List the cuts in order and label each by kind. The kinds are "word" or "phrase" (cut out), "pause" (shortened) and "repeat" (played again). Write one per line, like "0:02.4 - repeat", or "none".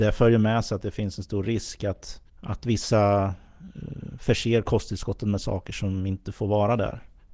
0:02.3 - pause

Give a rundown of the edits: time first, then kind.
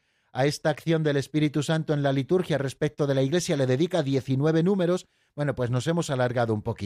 none

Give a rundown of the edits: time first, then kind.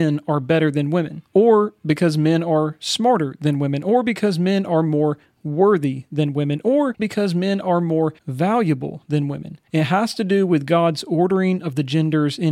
0:07.0 - word
0:08.2 - pause
0:09.7 - pause

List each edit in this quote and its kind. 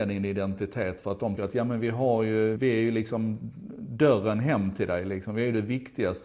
0:01.4 - word
0:02.6 - word

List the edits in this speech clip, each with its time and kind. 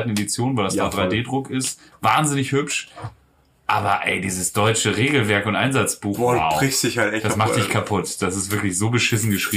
none

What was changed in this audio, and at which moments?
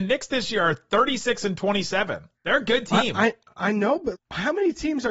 0:02.3 - pause
0:04.1 - word

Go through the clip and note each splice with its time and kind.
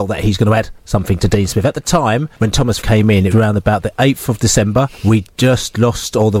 0:02.4 - pause
0:02.8 - word
0:03.3 - word
0:04.9 - pause

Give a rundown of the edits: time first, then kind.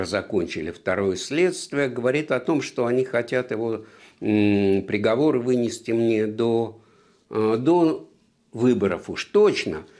none

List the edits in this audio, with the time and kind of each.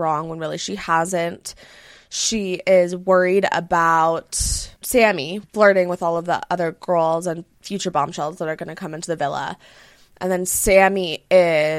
none

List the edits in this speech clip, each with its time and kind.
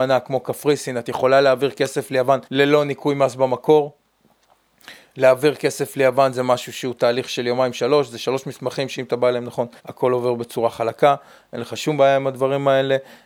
0:02.4 - pause
0:09.8 - pause

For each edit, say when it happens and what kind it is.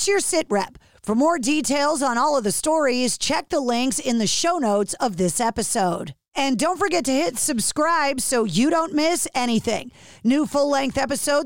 none

